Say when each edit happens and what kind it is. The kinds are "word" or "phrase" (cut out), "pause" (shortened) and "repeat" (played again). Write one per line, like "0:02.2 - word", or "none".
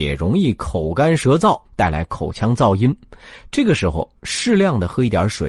0:01.6 - pause